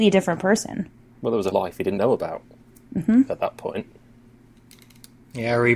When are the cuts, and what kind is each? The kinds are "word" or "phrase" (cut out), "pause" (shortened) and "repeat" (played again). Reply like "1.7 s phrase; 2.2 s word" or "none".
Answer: 1.5 s word; 2.0 s word